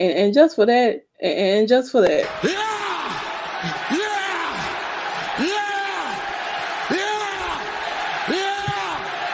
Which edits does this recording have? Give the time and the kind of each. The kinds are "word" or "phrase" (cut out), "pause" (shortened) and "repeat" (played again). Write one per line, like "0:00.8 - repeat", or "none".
0:01.1 - pause